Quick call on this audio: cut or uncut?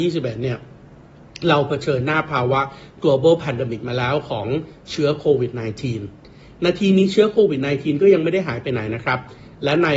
uncut